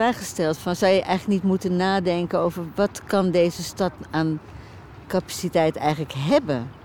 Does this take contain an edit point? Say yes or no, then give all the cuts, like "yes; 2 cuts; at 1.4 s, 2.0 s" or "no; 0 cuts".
no; 0 cuts